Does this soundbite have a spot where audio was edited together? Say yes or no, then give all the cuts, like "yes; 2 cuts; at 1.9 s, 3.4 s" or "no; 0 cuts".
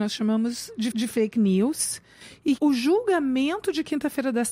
yes; 2 cuts; at 0.9 s, 2.6 s